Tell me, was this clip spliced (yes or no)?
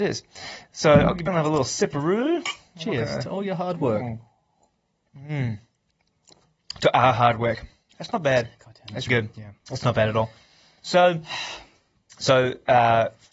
yes